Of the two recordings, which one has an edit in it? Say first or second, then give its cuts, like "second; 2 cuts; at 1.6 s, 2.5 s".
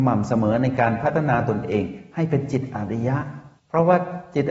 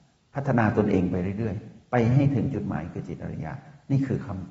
first; 1 cut; at 3.6 s